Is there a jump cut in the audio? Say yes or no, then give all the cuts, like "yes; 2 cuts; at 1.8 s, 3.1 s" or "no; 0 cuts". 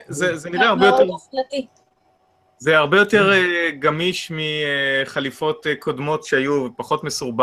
no; 0 cuts